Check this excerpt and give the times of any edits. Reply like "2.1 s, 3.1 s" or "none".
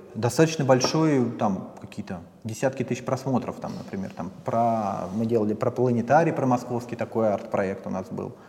none